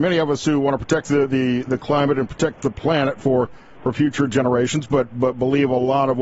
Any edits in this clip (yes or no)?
no